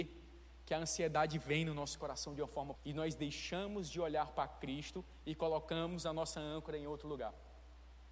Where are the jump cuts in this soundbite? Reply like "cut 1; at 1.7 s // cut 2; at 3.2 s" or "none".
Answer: cut 1; at 2.8 s